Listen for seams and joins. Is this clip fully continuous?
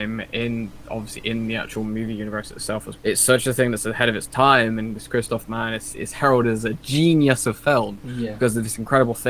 no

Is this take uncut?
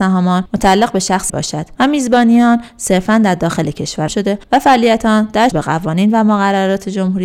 no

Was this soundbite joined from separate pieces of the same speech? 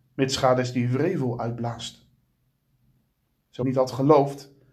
yes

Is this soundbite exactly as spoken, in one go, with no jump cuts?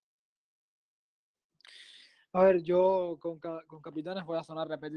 yes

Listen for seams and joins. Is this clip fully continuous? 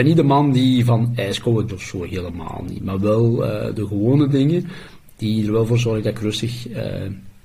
no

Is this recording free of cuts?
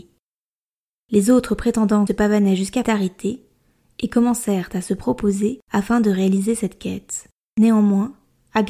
no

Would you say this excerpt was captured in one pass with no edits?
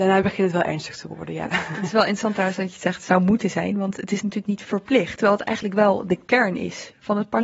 yes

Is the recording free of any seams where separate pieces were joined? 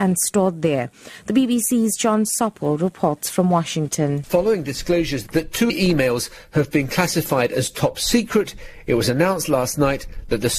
yes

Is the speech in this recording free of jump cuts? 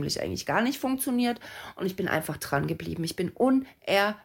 yes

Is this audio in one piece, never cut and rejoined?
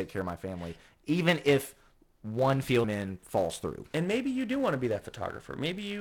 no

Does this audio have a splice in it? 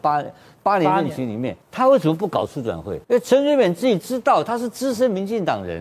yes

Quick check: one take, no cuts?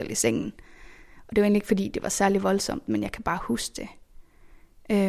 yes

